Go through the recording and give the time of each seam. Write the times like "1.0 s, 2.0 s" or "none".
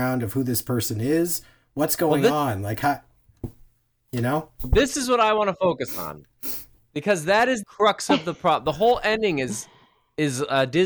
7.6 s